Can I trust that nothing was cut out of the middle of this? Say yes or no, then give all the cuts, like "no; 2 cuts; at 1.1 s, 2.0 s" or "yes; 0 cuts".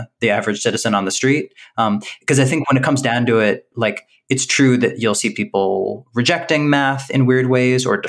yes; 0 cuts